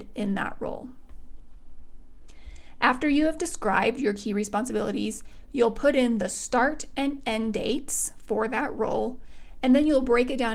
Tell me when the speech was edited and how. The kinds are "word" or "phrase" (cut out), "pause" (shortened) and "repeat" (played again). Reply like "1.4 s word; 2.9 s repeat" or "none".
none